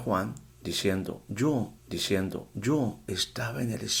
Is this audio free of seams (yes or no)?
no